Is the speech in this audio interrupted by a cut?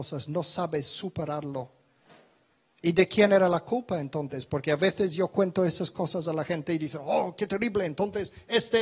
no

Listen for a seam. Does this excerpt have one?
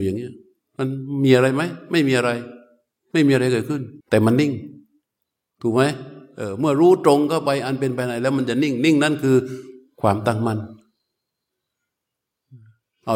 yes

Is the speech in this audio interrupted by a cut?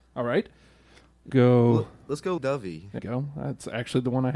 yes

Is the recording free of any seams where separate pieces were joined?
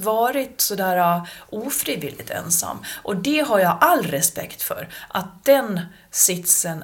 yes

